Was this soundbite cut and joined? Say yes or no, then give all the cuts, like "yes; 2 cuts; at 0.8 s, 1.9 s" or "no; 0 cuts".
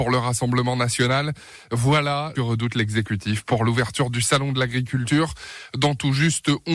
yes; 1 cut; at 2.3 s